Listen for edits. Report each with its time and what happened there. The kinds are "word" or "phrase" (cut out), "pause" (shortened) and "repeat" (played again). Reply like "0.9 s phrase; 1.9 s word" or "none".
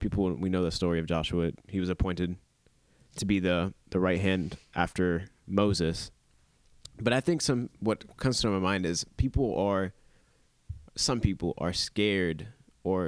10.9 s pause